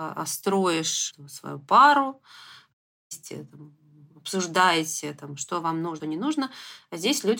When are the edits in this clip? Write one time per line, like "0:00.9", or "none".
0:06.0